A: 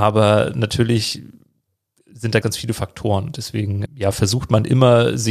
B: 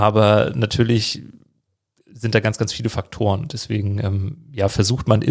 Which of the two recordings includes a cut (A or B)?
A